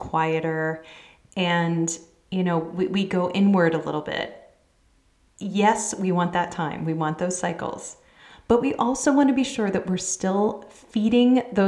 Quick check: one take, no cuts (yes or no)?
yes